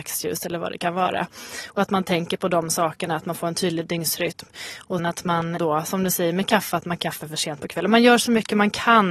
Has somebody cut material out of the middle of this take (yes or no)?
yes